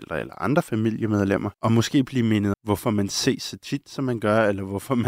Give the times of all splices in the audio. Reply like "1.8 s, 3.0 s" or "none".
1.5 s, 2.5 s